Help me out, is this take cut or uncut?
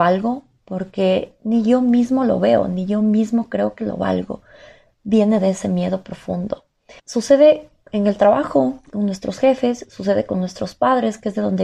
cut